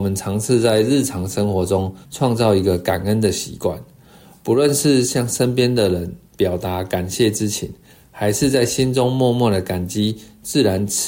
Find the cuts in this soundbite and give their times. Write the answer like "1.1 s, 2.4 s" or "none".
2.0 s